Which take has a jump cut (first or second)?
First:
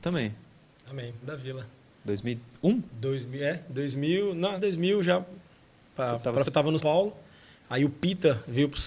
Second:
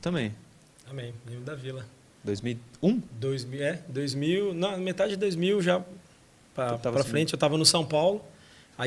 first